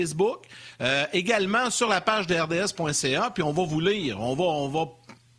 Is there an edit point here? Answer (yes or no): no